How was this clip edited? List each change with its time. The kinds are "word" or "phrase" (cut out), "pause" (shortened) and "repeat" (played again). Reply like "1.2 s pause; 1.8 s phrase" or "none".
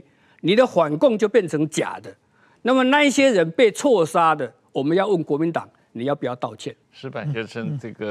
6.8 s pause